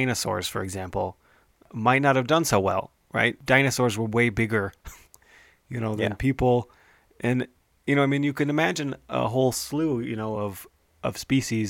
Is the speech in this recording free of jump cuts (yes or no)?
yes